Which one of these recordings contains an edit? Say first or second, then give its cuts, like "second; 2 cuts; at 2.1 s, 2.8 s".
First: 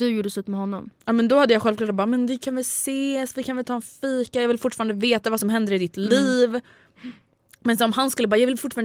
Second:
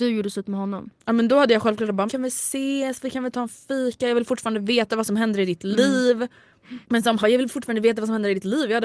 second; 3 cuts; at 2.1 s, 6.8 s, 7.2 s